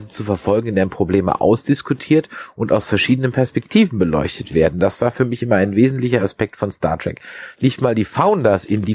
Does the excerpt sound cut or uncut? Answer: uncut